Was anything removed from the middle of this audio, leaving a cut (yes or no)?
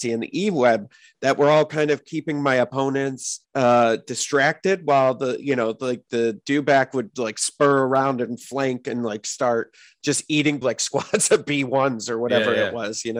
yes